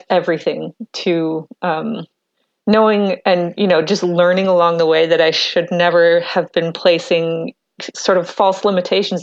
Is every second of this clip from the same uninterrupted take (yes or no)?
yes